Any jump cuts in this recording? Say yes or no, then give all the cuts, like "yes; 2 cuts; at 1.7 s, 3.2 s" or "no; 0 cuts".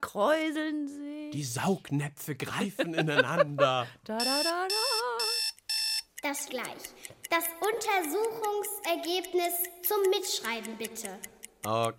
yes; 1 cut; at 6.5 s